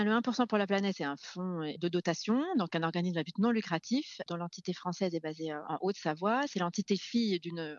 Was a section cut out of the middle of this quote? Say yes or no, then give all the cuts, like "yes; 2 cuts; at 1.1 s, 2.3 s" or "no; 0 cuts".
no; 0 cuts